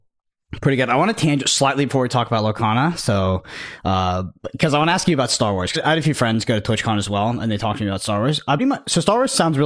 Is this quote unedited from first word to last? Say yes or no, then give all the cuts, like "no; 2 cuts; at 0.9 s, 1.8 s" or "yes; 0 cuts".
no; 2 cuts; at 5.7 s, 8.6 s